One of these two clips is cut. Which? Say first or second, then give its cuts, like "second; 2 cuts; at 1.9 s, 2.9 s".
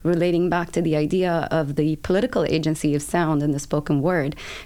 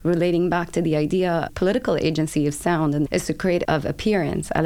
second; 3 cuts; at 1.5 s, 3.1 s, 3.6 s